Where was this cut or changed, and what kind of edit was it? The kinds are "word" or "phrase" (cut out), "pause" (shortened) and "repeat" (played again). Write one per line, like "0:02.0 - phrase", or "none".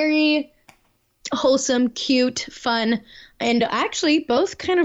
none